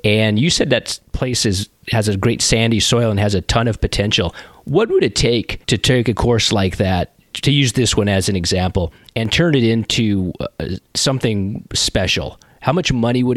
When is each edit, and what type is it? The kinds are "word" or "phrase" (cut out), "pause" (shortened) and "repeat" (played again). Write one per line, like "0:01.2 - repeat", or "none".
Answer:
0:05.6 - pause